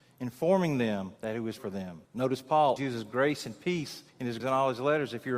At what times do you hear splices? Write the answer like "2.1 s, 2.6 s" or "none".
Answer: 1.2 s, 1.6 s, 2.0 s, 2.8 s, 4.1 s, 4.4 s